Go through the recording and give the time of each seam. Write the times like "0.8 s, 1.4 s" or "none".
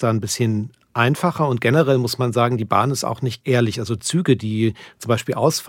3.4 s